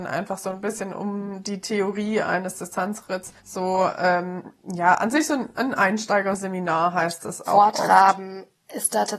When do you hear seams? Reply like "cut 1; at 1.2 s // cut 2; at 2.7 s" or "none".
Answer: cut 1; at 3.4 s

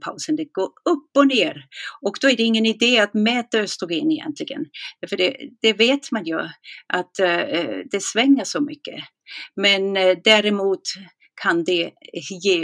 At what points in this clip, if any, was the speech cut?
none

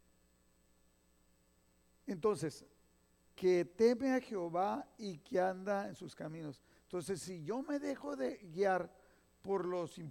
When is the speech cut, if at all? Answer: cut 1; at 3.4 s

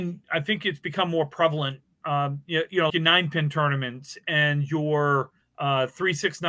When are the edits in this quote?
cut 1; at 2.9 s // cut 2; at 5.4 s

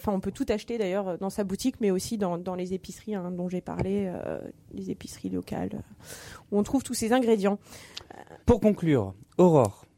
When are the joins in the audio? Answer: cut 1; at 8.4 s

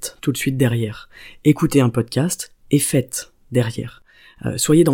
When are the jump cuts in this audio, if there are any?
none

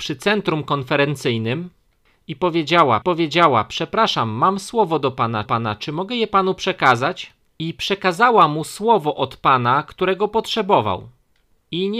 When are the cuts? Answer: cut 1; at 3.0 s // cut 2; at 5.4 s // cut 3; at 7.5 s

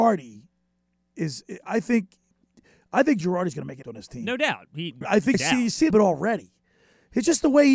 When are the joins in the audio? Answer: cut 1; at 3.2 s // cut 2; at 3.8 s // cut 3; at 5.0 s // cut 4; at 5.3 s // cut 5; at 5.9 s

